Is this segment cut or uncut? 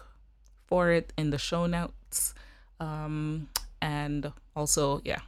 uncut